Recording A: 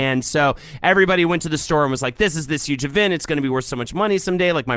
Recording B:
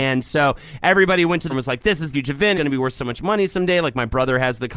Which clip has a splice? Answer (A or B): B